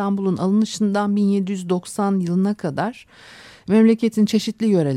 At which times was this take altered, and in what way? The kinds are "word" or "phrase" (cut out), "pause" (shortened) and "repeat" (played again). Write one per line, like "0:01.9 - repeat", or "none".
none